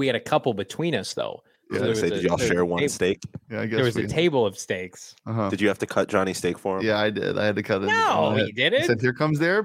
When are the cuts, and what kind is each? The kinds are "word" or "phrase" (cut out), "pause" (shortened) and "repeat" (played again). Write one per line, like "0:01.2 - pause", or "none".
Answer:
none